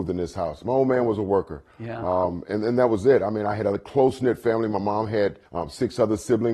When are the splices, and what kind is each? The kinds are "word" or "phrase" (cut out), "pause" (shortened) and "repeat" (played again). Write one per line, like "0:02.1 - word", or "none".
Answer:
0:05.5 - pause